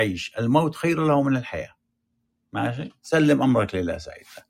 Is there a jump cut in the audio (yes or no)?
no